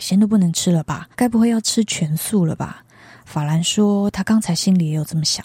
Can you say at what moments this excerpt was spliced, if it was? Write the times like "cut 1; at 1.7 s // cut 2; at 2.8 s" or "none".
cut 1; at 1.1 s